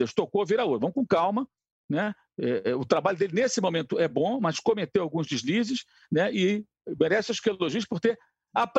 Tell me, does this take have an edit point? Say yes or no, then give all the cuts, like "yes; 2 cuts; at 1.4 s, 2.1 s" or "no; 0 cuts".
no; 0 cuts